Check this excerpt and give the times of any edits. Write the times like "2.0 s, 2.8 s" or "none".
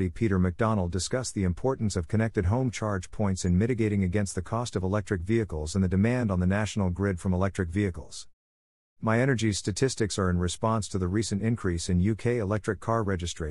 none